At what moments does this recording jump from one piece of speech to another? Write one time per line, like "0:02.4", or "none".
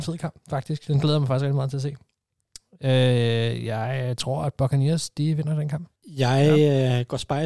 0:06.0